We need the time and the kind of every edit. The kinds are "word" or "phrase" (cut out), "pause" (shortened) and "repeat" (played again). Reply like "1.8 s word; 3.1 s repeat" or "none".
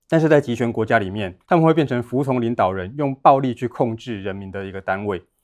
1.4 s pause